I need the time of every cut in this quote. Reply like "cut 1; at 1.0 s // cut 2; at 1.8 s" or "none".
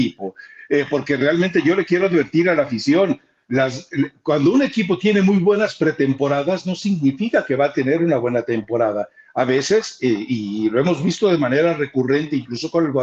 none

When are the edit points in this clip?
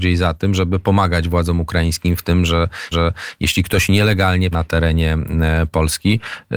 cut 1; at 2.9 s // cut 2; at 4.5 s

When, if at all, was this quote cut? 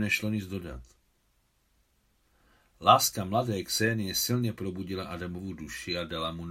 none

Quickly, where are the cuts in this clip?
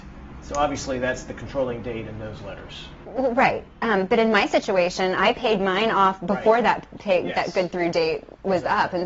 cut 1; at 3.7 s

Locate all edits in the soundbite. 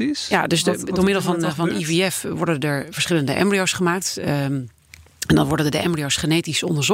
none

